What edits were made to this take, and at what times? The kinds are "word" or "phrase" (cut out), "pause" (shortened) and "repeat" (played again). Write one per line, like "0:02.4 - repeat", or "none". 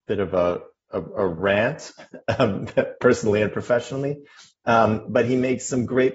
none